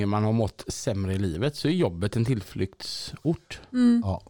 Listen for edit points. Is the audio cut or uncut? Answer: uncut